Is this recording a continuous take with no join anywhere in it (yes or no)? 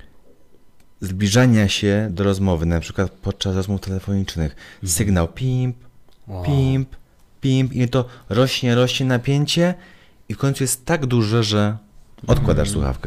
yes